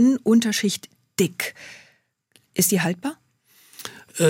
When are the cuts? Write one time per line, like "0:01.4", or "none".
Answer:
none